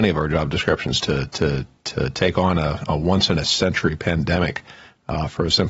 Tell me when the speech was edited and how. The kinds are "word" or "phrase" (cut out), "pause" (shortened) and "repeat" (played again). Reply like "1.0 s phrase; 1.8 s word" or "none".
none